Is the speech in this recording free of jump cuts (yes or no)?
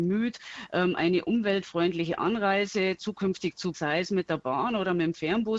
no